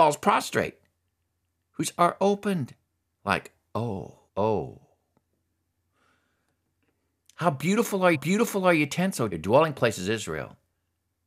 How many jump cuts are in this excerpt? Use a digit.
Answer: 4